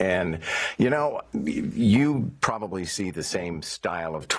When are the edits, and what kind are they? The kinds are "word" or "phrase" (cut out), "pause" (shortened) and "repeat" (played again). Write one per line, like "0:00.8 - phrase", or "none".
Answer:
none